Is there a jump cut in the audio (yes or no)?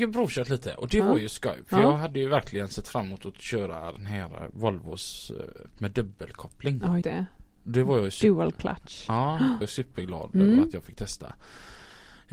yes